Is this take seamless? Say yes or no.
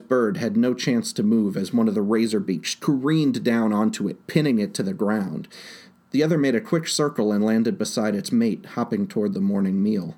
yes